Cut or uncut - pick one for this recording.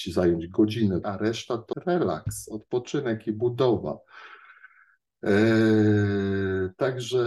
cut